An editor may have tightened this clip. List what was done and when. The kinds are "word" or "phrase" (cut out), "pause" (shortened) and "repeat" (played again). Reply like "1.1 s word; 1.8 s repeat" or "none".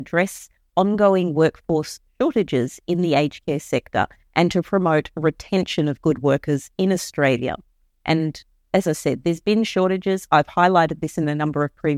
none